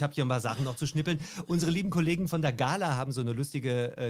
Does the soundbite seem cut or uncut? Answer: uncut